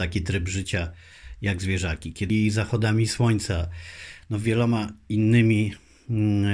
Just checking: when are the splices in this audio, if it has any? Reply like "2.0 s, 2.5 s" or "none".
2.3 s